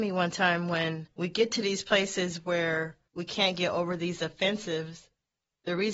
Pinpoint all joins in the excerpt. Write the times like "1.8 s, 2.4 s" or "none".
none